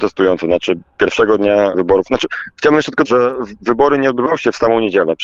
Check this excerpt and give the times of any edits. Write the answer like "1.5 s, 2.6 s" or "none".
1.7 s, 3.0 s